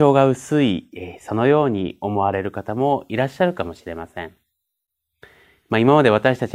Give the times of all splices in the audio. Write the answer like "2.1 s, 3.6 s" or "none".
none